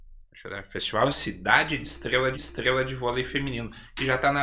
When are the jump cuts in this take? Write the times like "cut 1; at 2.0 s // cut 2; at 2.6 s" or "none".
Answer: cut 1; at 1.1 s // cut 2; at 2.3 s